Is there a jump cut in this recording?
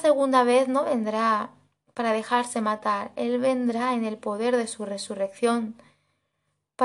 no; 0 cuts

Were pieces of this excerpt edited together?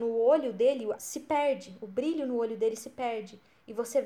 yes; 1 cut; at 1.0 s

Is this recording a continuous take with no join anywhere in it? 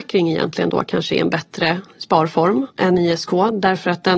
no; 1 cut; at 2.7 s

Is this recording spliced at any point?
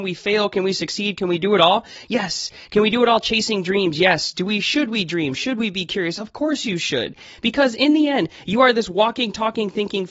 no; 0 cuts

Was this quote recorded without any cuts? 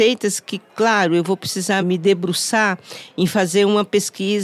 no; 1 cut; at 1.8 s

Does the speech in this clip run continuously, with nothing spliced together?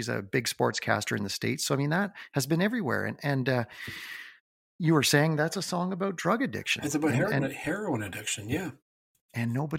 yes; 0 cuts

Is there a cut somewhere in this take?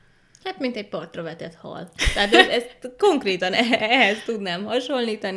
no; 0 cuts

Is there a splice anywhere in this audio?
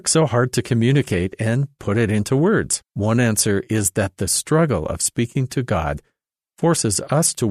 yes; 1 cut; at 2.9 s

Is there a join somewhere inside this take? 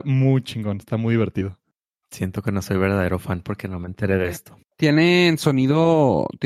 no; 0 cuts

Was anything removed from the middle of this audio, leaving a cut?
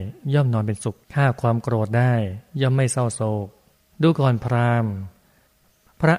yes; 2 cuts; at 1.0 s, 3.8 s

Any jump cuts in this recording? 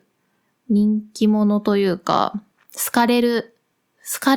yes; 1 cut; at 2.5 s

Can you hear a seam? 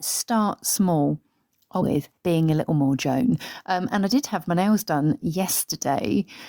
yes; 2 cuts; at 1.8 s, 2.2 s

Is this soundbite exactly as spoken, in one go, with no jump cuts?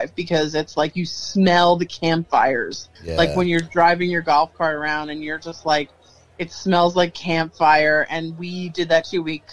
no; 1 cut; at 3.0 s

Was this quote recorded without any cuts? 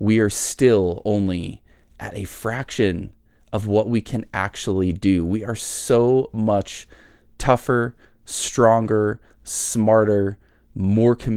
yes; 0 cuts

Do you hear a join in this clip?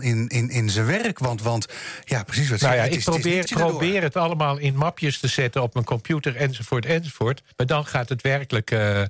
yes; 2 cuts; at 3.5 s, 7.5 s

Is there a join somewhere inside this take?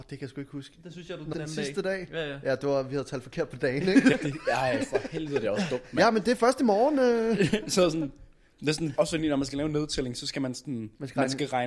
yes; 3 cuts; at 1.3 s, 4.1 s, 9.0 s

